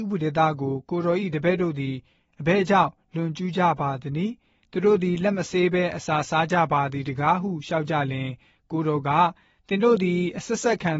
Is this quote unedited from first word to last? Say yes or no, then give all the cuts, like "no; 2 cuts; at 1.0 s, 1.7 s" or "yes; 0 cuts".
yes; 0 cuts